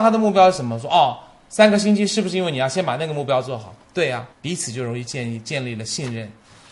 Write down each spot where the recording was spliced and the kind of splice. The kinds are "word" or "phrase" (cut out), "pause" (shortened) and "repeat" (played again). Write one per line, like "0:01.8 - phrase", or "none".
0:04.3 - pause